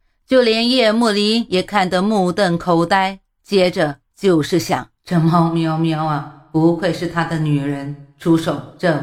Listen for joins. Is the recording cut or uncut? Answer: cut